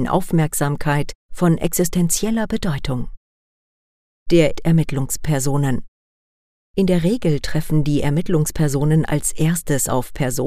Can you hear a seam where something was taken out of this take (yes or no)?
yes